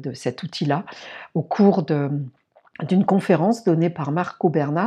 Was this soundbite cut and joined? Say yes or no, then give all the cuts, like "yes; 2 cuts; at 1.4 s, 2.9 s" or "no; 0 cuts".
no; 0 cuts